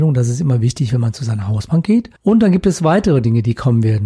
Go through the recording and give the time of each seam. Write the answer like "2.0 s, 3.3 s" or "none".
2.2 s